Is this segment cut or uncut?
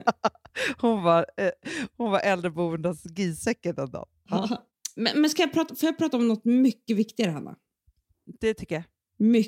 uncut